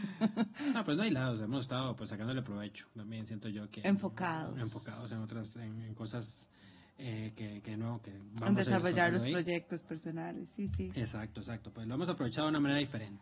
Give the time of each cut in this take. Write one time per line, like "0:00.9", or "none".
none